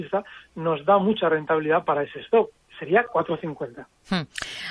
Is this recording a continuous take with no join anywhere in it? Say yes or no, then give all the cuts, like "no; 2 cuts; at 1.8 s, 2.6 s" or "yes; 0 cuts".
yes; 0 cuts